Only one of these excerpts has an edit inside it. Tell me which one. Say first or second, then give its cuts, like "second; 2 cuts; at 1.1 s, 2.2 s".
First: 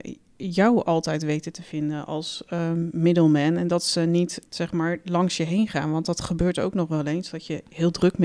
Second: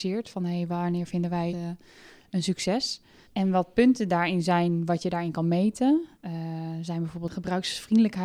second; 3 cuts; at 1.5 s, 3.2 s, 6.1 s